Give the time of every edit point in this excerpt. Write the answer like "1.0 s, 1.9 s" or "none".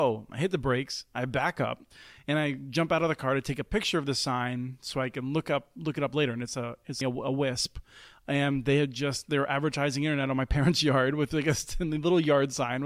7.0 s